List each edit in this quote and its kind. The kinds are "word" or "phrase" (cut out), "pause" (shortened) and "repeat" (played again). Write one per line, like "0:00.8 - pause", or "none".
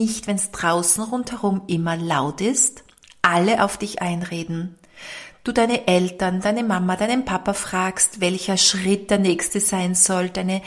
none